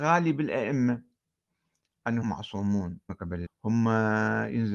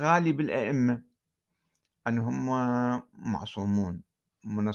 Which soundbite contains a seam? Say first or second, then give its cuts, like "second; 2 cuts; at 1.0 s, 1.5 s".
first; 3 cuts; at 2.2 s, 3.1 s, 3.5 s